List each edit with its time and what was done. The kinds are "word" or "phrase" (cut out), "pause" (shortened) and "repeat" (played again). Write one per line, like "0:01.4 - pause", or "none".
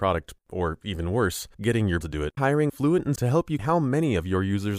0:01.5 - pause
0:02.0 - phrase
0:02.4 - word
0:02.7 - phrase
0:03.2 - word
0:03.6 - word